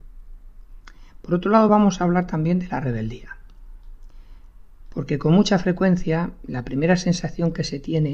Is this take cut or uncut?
uncut